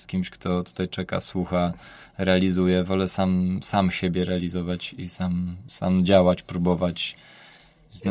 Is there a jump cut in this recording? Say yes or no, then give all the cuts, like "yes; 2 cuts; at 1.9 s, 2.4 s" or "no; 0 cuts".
no; 0 cuts